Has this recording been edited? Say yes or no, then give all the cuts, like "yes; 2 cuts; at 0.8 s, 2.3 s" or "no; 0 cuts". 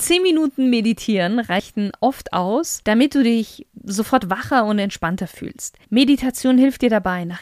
yes; 1 cut; at 5.8 s